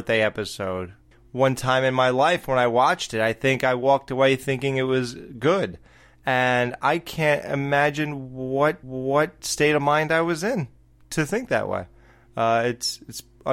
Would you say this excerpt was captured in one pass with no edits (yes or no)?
no